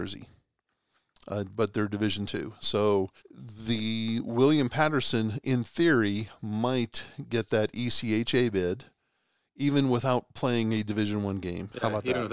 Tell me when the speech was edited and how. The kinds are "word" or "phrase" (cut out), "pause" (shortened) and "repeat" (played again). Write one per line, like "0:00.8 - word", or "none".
0:03.2 - pause